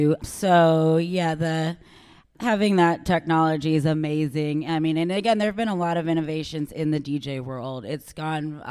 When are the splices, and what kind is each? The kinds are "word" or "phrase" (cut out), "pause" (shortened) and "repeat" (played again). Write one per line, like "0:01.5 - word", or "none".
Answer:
none